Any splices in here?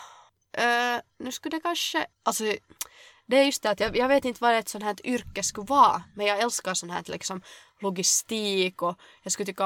yes; 1 cut; at 2.1 s

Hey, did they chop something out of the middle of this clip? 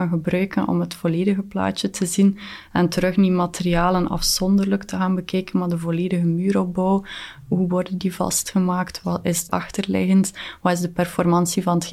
yes; 1 cut; at 9.5 s

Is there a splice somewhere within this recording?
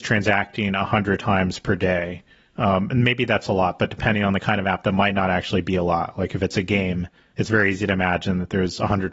no; 0 cuts

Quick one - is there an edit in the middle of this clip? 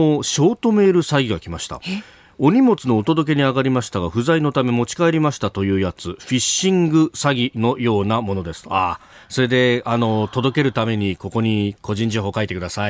no; 0 cuts

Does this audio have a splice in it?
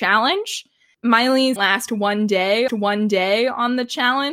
yes; 2 cuts; at 1.6 s, 2.7 s

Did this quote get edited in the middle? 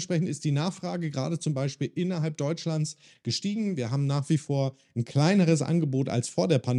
no; 0 cuts

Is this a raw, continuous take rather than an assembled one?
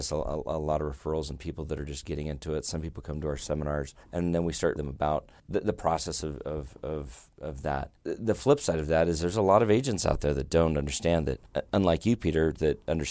no; 2 cuts; at 4.0 s, 4.8 s

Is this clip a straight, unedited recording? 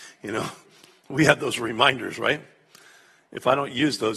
yes; 0 cuts

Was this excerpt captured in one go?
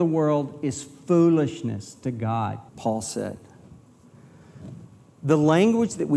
no; 1 cut; at 2.7 s

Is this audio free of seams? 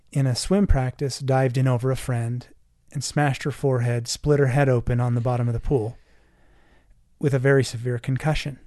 yes; 0 cuts

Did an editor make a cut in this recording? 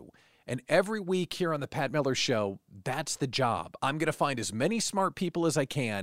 no; 0 cuts

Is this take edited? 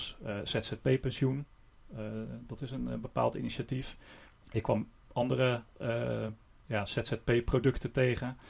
no; 0 cuts

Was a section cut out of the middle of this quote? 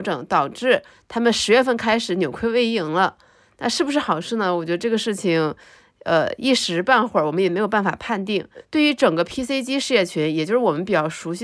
no; 0 cuts

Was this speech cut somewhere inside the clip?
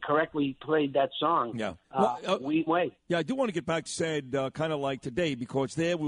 yes; 3 cuts; at 1.8 s, 2.7 s, 3.9 s

